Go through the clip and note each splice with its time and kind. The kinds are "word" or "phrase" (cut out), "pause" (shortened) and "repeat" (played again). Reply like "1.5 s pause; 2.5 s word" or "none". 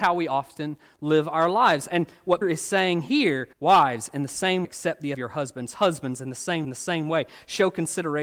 2.4 s word; 3.5 s pause; 4.6 s word; 5.1 s phrase; 6.6 s repeat

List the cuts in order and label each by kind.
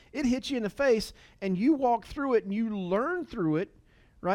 none

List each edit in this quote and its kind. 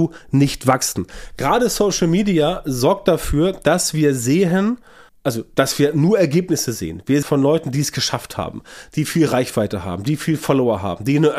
5.1 s pause; 7.2 s phrase

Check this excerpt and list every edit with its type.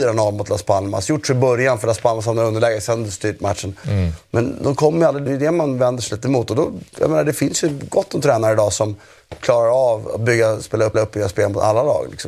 5.3 s word; 6.9 s pause; 10.9 s repeat

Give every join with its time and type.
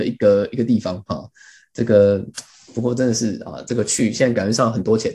none

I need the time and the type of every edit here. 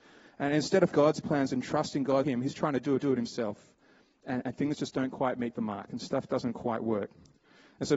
0.9 s word; 2.2 s phrase; 3.0 s repeat

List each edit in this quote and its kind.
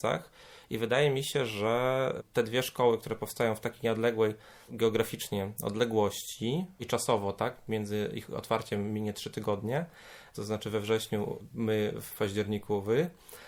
none

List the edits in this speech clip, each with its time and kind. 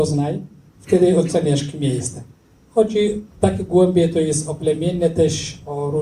3.3 s pause

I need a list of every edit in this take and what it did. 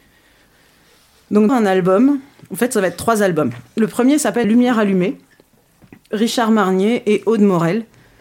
1.5 s word; 4.4 s word; 6.1 s word

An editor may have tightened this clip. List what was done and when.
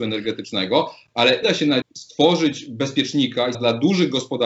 1.4 s word; 1.8 s word; 3.5 s word

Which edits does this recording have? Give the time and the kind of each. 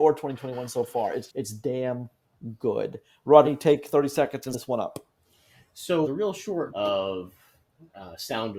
1.3 s word; 3.4 s word; 4.5 s word; 6.0 s word; 6.7 s word

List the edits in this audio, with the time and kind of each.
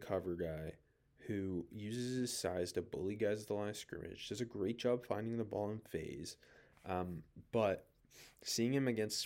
none

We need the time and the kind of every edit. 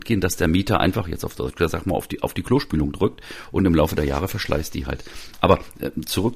none

